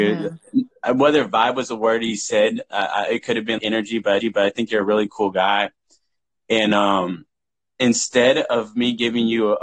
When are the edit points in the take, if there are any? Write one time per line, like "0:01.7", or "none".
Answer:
0:03.6
0:04.2

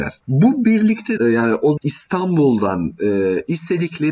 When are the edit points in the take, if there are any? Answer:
0:01.2
0:01.8

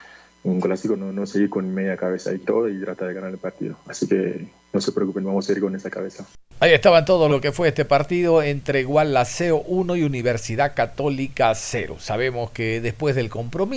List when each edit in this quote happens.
0:01.0
0:02.4
0:07.3

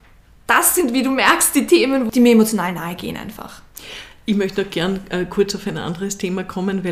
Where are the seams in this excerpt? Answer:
none

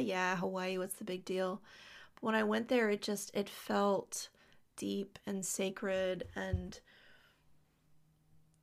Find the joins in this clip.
none

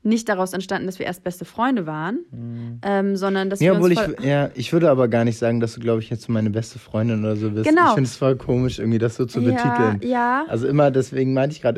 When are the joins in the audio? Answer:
none

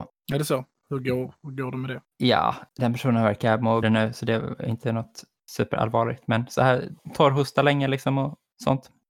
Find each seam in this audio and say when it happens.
0:03.8

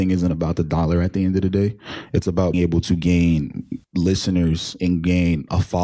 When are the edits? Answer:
0:02.5
0:03.8

